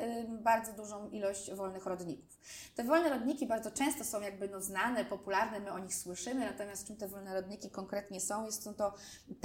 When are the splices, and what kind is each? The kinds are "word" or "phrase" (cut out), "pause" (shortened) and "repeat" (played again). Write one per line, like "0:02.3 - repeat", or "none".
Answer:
none

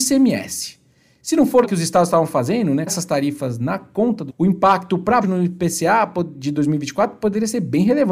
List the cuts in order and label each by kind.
0:01.6 - word
0:02.9 - word
0:04.3 - word
0:05.2 - word

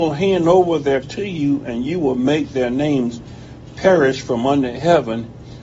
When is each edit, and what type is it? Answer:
0:01.0 - word

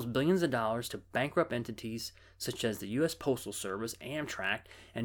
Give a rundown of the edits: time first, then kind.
none

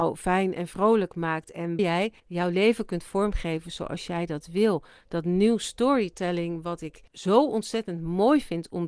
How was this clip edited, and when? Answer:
0:01.8 - word
0:02.2 - pause
0:07.1 - pause

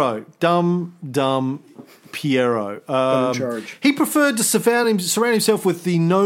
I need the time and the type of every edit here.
none

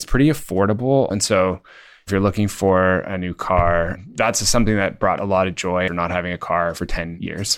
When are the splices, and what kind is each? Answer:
0:01.1 - word
0:05.2 - word
0:05.9 - word

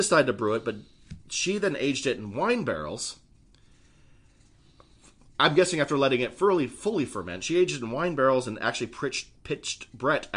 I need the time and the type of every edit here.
none

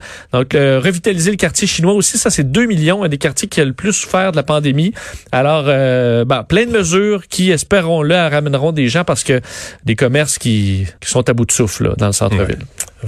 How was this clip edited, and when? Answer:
0:11.0 - pause

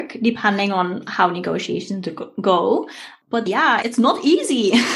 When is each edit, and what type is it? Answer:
0:03.5 - word
0:03.8 - word

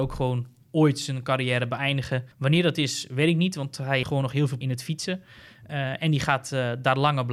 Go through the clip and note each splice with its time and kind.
0:02.3 - pause
0:04.0 - word
0:04.6 - phrase

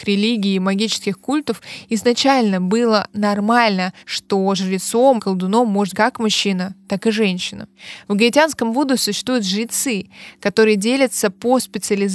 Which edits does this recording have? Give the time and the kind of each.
0:04.0 - pause
0:05.2 - word
0:05.9 - word

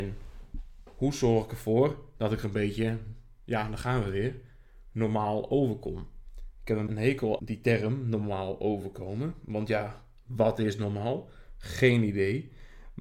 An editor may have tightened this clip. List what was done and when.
0:06.9 - word
0:07.4 - word

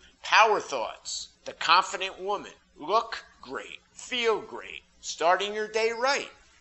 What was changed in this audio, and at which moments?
0:01.3 - pause
0:02.6 - pause
0:03.9 - pause
0:04.9 - pause

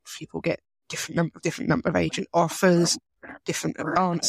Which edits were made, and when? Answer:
0:01.4 - word

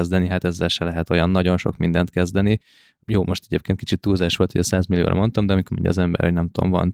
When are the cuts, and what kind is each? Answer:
0:05.7 - word

